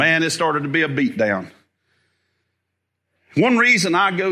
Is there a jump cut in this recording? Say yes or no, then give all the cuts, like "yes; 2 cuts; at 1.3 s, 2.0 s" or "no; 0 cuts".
no; 0 cuts